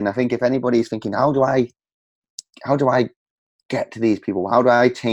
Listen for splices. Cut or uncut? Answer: uncut